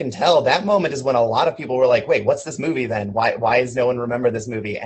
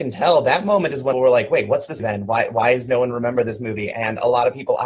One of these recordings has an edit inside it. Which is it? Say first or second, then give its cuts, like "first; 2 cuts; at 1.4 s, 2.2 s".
second; 2 cuts; at 1.1 s, 2.0 s